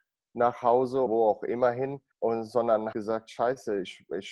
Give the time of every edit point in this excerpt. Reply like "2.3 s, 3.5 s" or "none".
1.1 s, 2.1 s, 2.9 s